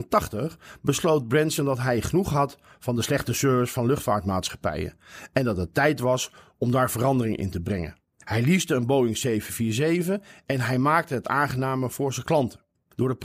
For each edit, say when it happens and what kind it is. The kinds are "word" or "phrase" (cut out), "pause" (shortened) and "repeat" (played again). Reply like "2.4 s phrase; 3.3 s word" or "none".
none